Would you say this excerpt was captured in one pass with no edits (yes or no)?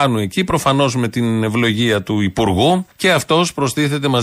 no